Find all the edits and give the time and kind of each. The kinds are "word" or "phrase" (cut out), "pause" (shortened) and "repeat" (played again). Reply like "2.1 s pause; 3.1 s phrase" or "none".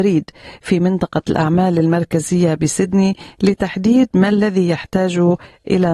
none